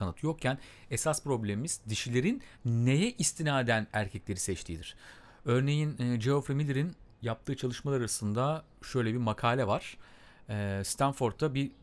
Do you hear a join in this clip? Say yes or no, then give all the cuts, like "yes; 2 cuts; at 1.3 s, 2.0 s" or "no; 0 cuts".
yes; 2 cuts; at 2.5 s, 7.1 s